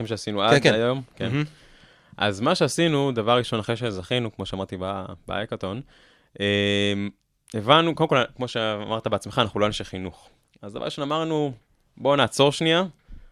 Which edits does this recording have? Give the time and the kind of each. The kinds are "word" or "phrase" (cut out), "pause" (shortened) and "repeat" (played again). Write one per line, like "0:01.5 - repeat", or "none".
none